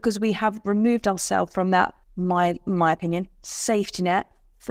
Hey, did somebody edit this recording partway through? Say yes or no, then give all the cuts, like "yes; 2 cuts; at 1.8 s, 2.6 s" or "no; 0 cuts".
yes; 1 cut; at 2.0 s